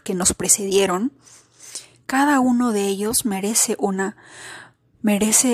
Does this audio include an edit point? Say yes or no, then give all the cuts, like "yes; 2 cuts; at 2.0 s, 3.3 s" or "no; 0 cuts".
no; 0 cuts